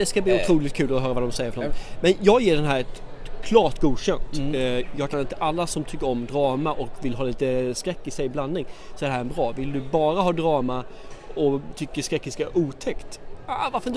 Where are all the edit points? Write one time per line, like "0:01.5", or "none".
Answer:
0:05.1